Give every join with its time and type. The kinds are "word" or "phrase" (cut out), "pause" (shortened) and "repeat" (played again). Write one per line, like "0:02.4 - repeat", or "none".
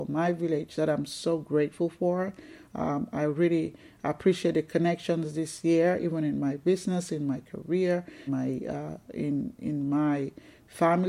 0:08.3 - word